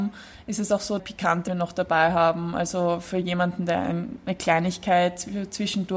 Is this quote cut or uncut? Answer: cut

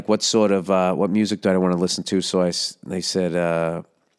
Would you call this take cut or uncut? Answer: uncut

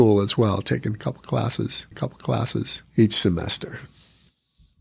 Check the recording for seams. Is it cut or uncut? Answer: cut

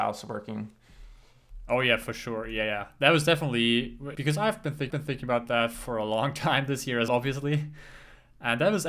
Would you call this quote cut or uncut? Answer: cut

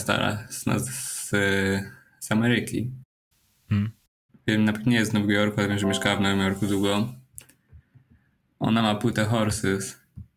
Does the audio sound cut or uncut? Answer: uncut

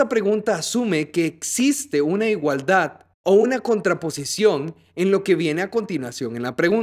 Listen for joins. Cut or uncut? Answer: uncut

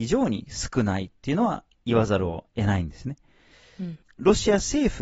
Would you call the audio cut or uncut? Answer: cut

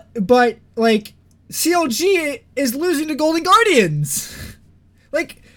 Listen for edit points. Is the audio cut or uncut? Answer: uncut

